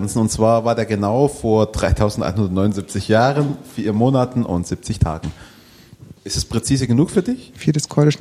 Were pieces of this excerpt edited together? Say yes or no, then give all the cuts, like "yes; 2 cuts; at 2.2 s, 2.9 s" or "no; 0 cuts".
yes; 1 cut; at 6.2 s